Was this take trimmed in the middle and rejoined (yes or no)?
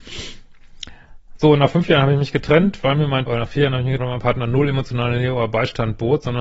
yes